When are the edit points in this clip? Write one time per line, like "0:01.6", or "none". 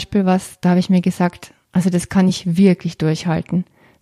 none